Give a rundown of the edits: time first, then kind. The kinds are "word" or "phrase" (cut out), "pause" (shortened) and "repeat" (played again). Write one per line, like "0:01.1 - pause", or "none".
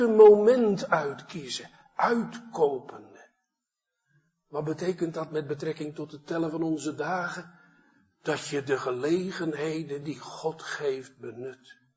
none